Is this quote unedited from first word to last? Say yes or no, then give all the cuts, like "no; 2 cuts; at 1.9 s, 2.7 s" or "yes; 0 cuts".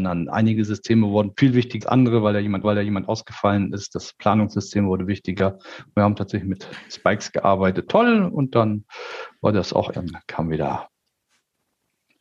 no; 5 cuts; at 1.3 s, 1.8 s, 2.6 s, 7.9 s, 9.9 s